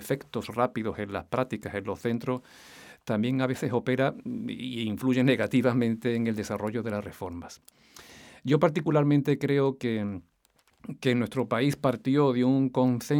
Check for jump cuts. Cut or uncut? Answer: uncut